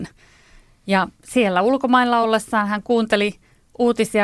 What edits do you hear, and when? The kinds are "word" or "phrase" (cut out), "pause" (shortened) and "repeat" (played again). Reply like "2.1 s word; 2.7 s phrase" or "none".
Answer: none